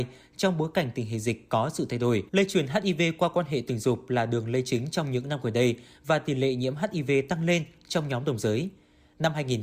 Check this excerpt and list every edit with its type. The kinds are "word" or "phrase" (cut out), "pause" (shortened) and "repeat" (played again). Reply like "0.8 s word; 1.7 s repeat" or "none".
2.3 s pause